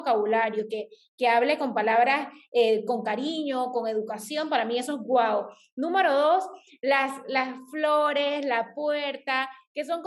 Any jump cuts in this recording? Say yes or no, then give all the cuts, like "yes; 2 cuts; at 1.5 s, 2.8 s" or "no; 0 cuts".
no; 0 cuts